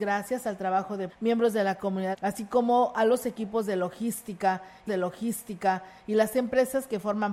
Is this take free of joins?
no; 3 cuts; at 1.1 s, 2.1 s, 4.9 s

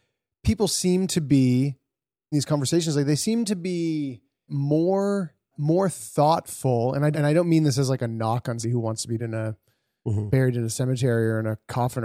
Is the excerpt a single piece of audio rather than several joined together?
no; 6 cuts; at 2.3 s, 4.5 s, 5.5 s, 7.1 s, 8.6 s, 9.2 s

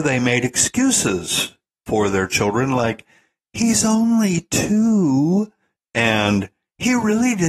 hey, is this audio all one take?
yes; 0 cuts

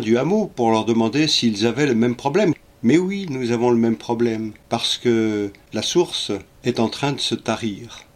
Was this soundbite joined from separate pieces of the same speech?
yes; 1 cut; at 2.6 s

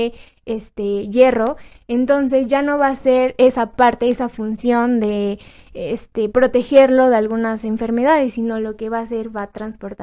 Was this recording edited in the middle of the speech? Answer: no; 0 cuts

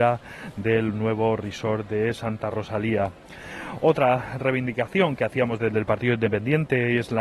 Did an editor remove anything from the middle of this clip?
no; 0 cuts

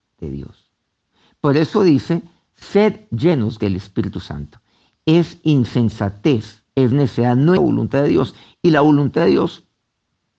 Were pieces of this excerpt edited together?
yes; 1 cut; at 7.6 s

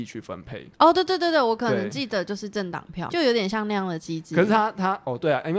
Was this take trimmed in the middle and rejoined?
yes; 1 cut; at 3.1 s

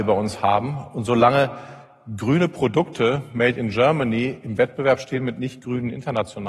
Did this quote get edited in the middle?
no; 0 cuts

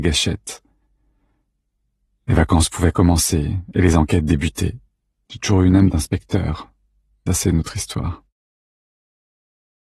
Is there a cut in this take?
yes; 2 cuts; at 4.9 s, 7.3 s

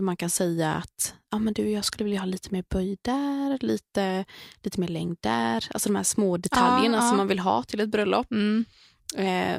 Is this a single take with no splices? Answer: yes; 0 cuts

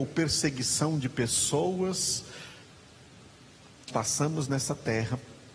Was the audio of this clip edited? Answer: yes; 1 cut; at 3.9 s

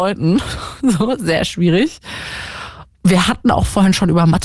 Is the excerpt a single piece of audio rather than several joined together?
no; 1 cut; at 2.9 s

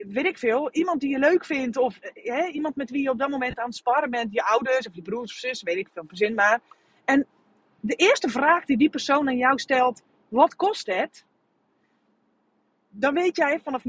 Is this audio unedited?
yes; 0 cuts

